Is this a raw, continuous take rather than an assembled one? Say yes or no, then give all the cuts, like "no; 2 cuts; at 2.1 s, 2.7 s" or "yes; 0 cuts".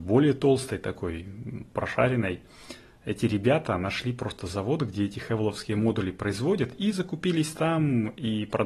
yes; 0 cuts